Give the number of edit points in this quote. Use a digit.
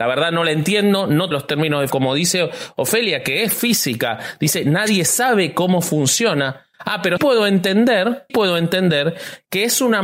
4